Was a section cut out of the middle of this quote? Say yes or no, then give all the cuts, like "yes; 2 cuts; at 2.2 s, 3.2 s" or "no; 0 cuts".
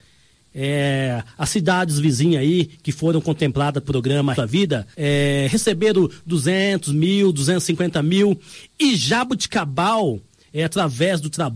yes; 3 cuts; at 3.8 s, 4.3 s, 4.9 s